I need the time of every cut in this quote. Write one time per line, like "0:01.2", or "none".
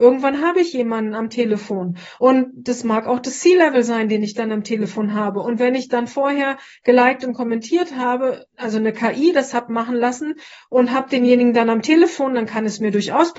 none